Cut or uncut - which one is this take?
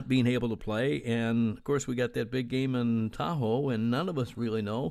uncut